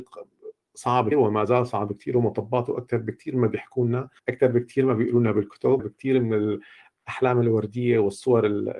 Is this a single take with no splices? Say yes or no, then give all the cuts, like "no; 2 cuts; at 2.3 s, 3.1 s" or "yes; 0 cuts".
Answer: no; 3 cuts; at 1.1 s, 4.2 s, 5.8 s